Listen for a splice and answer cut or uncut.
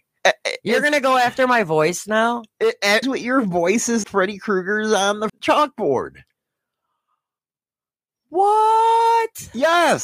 cut